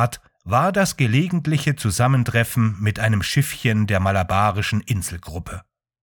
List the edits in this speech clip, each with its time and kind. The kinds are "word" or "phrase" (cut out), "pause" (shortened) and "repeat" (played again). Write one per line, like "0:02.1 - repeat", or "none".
none